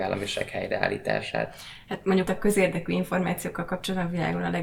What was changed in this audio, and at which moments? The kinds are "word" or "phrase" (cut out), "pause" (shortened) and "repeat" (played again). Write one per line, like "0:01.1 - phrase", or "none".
0:02.3 - word